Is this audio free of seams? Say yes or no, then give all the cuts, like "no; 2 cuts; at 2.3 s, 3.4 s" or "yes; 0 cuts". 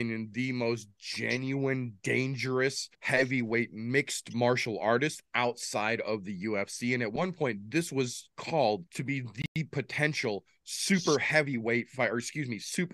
no; 2 cuts; at 2.9 s, 8.9 s